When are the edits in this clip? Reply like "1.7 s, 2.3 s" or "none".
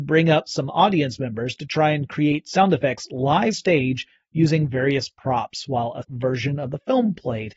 3.5 s, 6.0 s